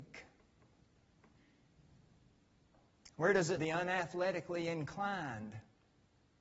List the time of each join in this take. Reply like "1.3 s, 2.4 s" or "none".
3.6 s